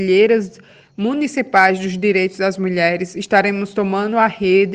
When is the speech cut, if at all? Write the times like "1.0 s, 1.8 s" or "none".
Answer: none